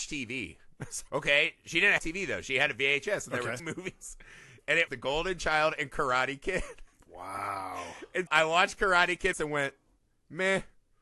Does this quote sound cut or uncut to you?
cut